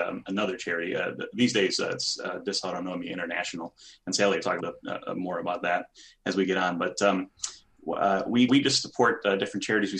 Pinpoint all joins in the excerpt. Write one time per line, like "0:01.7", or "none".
0:04.6
0:08.5